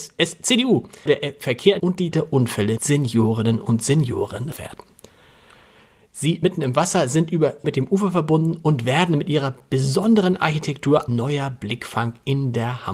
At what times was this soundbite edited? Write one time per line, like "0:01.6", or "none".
0:01.1
0:01.8
0:02.1
0:02.8
0:04.5
0:06.4
0:07.6
0:11.1